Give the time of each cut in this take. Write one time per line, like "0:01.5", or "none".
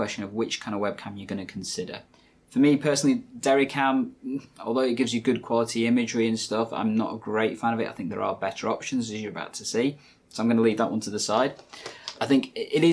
none